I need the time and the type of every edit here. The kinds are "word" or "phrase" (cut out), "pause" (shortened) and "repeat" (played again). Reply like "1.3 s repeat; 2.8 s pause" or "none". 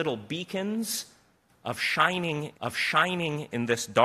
2.5 s repeat